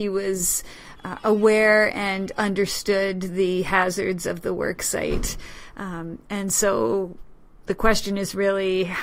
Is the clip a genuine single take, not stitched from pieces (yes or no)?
yes